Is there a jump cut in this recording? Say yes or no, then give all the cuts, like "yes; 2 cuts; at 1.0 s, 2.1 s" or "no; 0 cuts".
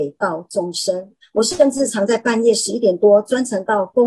yes; 1 cut; at 1.2 s